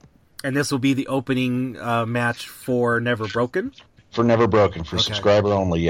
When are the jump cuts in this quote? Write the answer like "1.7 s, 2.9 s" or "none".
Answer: none